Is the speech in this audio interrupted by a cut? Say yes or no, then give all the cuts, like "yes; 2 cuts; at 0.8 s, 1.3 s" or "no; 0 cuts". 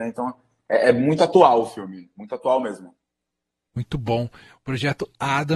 no; 0 cuts